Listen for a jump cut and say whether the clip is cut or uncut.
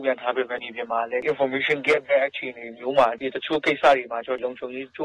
uncut